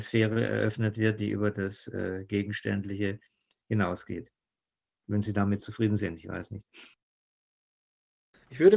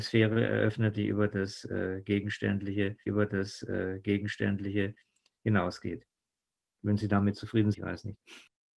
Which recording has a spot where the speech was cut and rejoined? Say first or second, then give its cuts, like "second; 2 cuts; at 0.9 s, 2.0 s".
second; 3 cuts; at 0.9 s, 3.1 s, 7.7 s